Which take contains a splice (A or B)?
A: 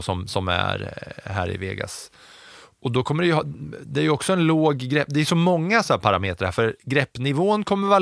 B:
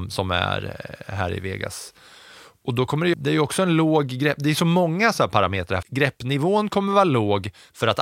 B